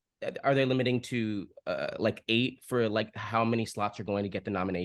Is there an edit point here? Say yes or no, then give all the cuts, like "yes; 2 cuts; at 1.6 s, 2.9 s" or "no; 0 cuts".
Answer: no; 0 cuts